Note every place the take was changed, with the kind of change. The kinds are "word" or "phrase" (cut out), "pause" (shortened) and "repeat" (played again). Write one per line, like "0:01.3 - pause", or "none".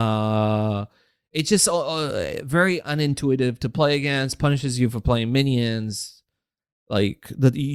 none